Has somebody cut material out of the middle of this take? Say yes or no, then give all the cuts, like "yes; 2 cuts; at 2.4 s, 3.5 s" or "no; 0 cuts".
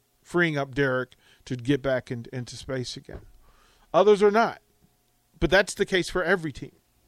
no; 0 cuts